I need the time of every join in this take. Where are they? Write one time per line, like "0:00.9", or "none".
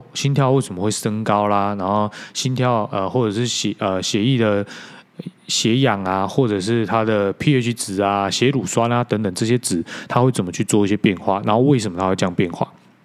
0:05.4